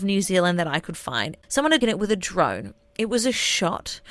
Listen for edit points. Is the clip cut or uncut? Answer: cut